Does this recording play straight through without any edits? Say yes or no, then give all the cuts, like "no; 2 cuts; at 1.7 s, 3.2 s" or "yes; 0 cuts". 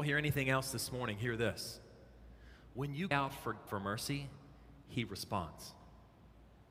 no; 2 cuts; at 3.1 s, 3.7 s